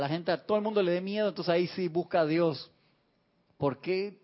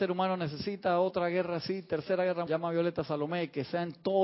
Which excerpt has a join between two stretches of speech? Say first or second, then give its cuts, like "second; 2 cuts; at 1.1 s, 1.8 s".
second; 1 cut; at 2.5 s